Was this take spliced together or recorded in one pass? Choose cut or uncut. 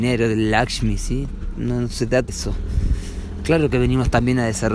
cut